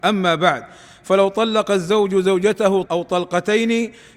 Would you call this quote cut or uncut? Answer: cut